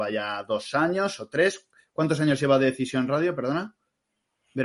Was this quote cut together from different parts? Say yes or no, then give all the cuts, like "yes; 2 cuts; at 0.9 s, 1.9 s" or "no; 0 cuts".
no; 0 cuts